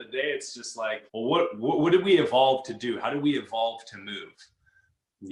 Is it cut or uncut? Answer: cut